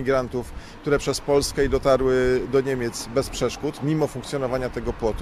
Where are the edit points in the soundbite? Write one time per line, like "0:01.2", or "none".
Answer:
0:01.0